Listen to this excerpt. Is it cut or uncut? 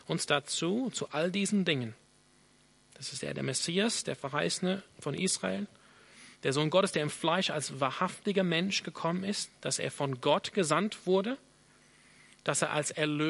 uncut